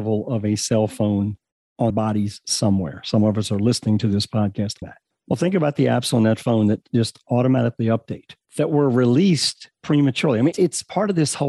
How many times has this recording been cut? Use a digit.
3